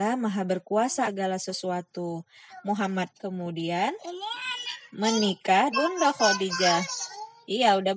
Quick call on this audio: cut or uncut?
cut